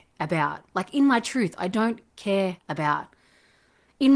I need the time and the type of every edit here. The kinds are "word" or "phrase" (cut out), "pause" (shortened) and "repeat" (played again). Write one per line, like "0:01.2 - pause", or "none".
0:02.6 - pause